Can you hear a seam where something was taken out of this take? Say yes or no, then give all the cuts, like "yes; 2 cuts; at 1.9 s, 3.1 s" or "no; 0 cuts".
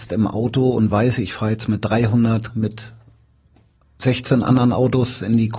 yes; 1 cut; at 2.5 s